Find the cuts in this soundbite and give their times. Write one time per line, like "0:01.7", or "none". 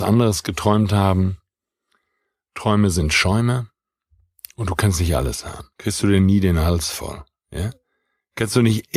0:05.7